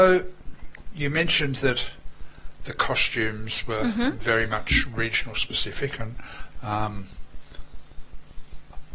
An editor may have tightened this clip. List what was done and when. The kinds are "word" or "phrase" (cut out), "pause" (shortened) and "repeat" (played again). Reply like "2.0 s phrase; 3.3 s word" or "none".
none